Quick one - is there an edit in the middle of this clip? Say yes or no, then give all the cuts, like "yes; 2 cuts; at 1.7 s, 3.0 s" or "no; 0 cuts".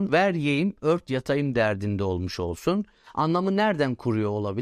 no; 0 cuts